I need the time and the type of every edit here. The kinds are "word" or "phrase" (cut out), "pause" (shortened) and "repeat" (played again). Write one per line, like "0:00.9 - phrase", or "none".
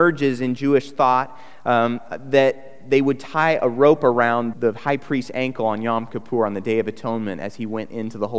0:04.5 - word